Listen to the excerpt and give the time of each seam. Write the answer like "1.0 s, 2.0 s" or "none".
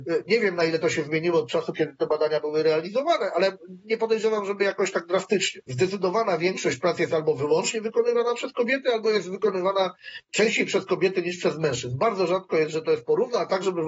none